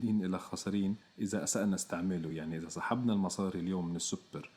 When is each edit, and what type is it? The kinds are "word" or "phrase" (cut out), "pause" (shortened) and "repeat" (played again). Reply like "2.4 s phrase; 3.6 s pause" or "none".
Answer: none